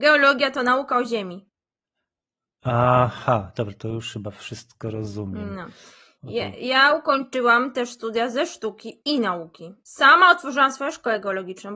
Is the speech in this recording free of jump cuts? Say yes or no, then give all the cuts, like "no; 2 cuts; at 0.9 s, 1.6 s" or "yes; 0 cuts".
yes; 0 cuts